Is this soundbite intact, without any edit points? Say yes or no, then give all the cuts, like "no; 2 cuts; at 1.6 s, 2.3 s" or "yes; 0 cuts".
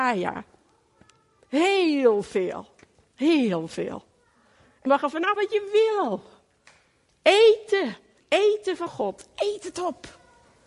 no; 4 cuts; at 4.9 s, 5.4 s, 8.2 s, 8.9 s